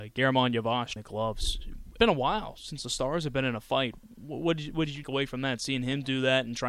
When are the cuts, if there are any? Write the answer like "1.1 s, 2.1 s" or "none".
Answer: 1.0 s, 2.0 s, 5.0 s